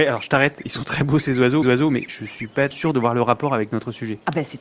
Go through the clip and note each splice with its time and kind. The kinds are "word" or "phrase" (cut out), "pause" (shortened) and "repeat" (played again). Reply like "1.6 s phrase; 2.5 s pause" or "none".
1.6 s repeat; 2.7 s word

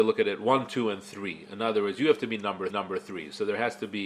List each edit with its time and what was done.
2.7 s repeat

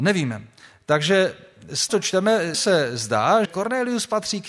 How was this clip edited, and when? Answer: 1.9 s word; 2.5 s word; 3.4 s word

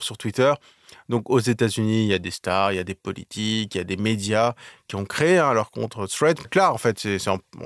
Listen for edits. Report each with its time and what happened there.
6.4 s word

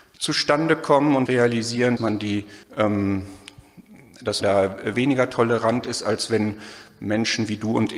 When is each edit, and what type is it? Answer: 1.3 s word; 2.0 s word; 2.6 s pause; 4.4 s word; 4.9 s phrase

